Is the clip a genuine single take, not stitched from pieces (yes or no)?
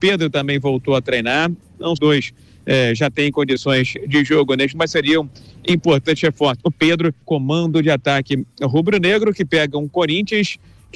no